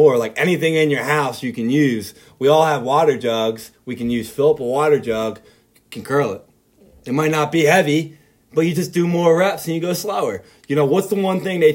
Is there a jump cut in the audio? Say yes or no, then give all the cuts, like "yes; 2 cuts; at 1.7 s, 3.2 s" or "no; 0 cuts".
no; 0 cuts